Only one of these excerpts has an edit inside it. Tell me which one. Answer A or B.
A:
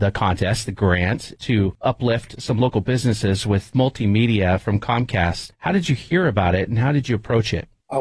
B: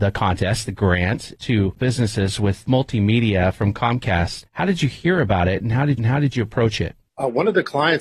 B